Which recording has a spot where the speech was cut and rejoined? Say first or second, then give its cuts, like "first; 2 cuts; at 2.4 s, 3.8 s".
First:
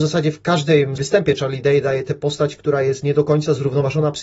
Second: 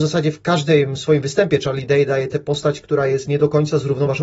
first; 1 cut; at 1.0 s